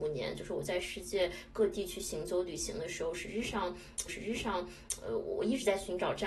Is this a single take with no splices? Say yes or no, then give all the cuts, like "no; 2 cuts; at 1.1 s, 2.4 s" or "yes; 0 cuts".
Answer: no; 1 cut; at 4.1 s